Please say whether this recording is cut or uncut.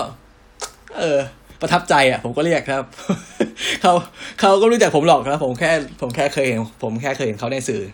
cut